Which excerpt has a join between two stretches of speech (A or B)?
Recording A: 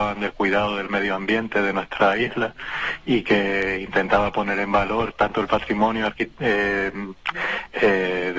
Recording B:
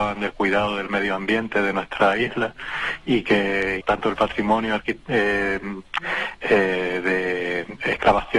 B